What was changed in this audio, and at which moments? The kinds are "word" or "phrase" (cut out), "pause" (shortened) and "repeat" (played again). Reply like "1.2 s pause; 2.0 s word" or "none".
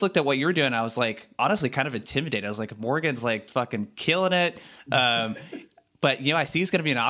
1.3 s pause; 3.5 s word